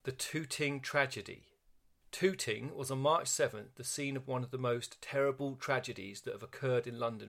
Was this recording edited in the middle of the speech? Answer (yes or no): no